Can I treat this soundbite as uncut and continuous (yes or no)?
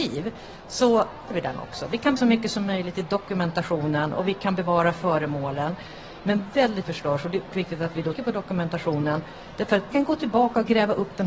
no